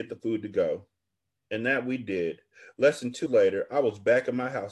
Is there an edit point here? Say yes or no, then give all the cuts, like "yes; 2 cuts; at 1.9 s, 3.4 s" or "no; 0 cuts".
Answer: yes; 1 cut; at 3.3 s